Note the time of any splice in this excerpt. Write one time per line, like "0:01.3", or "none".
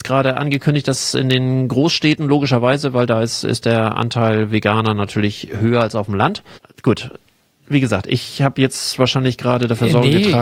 0:06.6